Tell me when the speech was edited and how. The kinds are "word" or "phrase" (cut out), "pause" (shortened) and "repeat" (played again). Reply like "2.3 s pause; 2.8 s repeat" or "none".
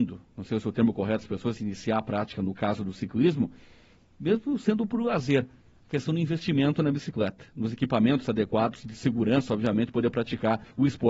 none